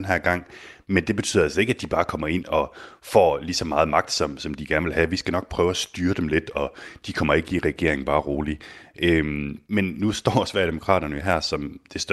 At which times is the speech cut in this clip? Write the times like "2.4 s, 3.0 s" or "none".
none